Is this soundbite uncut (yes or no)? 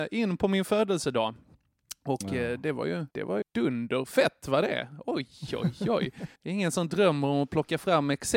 no